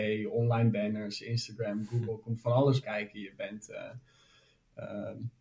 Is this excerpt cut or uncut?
cut